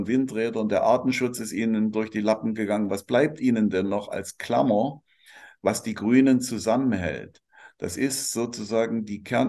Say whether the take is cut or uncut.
uncut